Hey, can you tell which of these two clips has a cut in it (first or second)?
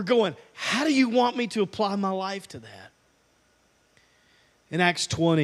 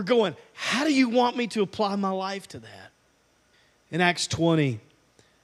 second